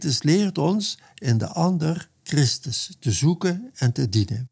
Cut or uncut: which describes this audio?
uncut